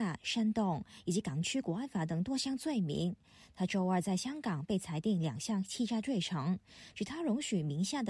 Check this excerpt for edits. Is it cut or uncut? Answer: uncut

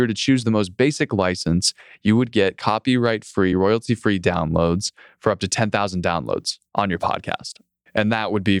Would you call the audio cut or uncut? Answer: uncut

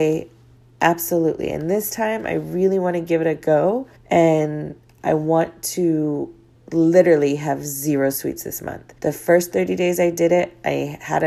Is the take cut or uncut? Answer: cut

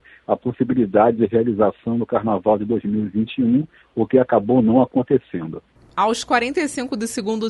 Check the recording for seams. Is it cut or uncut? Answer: uncut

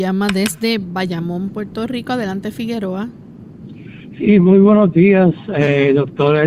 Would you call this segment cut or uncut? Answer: uncut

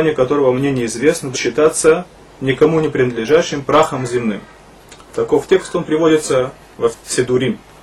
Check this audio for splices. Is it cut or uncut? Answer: cut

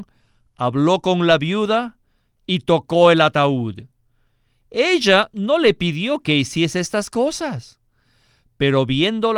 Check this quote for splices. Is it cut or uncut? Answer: uncut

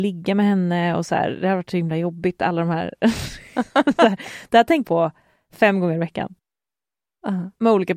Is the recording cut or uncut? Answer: cut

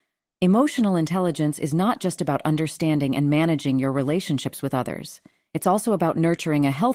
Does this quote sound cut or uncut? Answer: uncut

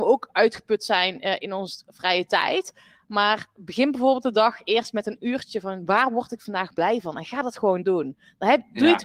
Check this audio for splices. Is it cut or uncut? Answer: uncut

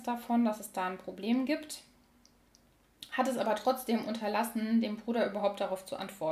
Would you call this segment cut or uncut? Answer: uncut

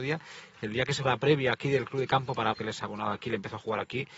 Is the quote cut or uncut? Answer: cut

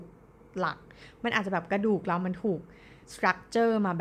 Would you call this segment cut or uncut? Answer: cut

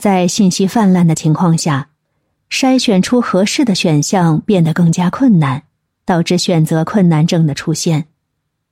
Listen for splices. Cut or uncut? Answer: uncut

